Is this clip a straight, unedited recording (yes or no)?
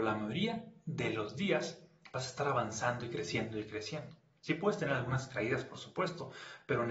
yes